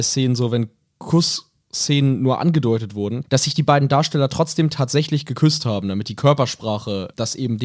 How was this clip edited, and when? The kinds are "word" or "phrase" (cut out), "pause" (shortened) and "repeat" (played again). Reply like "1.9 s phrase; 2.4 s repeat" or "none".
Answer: none